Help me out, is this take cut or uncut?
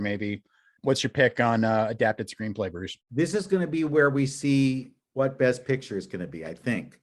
cut